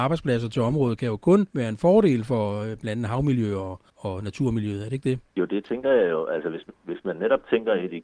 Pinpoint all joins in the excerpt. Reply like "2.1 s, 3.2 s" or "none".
1.5 s, 3.9 s, 5.3 s